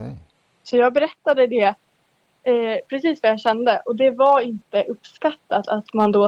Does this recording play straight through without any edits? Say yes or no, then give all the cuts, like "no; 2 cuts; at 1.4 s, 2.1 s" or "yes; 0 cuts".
yes; 0 cuts